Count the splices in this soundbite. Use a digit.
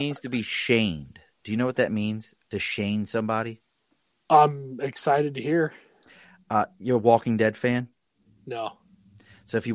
0